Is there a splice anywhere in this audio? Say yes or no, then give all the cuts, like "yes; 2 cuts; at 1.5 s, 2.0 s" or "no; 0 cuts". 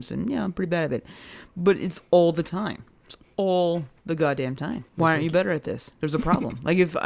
yes; 1 cut; at 4.9 s